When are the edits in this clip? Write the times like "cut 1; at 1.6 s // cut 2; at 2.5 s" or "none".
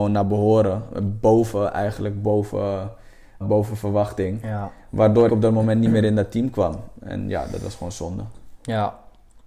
cut 1; at 3.4 s // cut 2; at 5.3 s